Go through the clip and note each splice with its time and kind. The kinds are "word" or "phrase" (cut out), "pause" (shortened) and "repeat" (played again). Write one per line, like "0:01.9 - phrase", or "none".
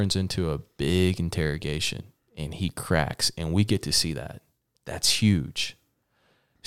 none